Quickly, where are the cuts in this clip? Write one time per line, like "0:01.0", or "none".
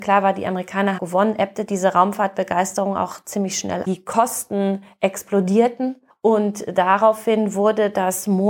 0:01.0
0:03.8
0:06.1